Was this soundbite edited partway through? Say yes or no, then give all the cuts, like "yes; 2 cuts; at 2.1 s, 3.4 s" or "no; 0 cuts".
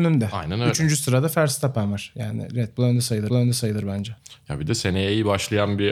yes; 1 cut; at 3.3 s